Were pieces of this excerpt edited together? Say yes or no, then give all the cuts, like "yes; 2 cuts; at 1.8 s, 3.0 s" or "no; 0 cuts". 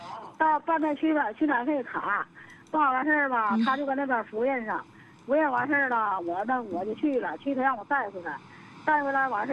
no; 0 cuts